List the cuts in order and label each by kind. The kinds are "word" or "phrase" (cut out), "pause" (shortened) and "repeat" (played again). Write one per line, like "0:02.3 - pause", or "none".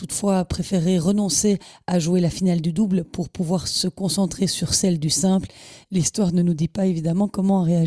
none